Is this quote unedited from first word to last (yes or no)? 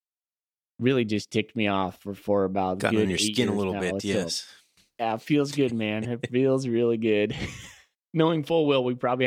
yes